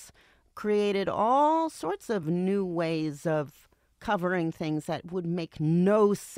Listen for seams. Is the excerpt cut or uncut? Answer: uncut